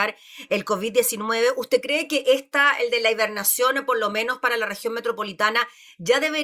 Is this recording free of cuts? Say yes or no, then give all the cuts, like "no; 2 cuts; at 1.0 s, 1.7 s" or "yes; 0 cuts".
yes; 0 cuts